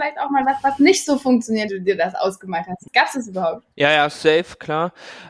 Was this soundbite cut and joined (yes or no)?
yes